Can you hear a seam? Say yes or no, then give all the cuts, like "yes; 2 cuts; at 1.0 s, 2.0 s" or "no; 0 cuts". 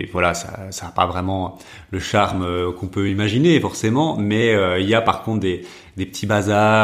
no; 0 cuts